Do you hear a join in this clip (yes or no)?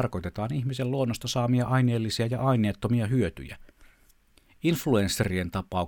no